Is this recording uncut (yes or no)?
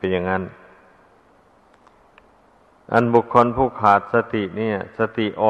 yes